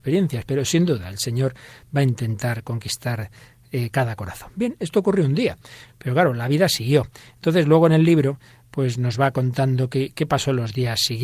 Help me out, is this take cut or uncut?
uncut